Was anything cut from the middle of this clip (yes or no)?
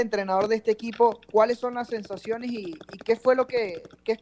no